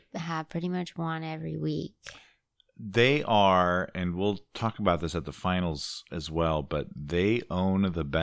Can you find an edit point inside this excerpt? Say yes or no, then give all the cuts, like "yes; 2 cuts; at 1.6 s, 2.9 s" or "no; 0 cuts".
no; 0 cuts